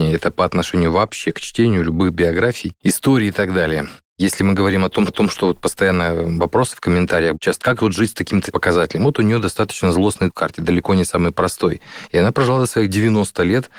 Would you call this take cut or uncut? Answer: cut